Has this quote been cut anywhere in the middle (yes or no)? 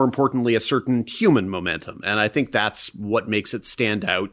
no